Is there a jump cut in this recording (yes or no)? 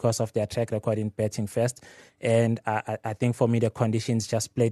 no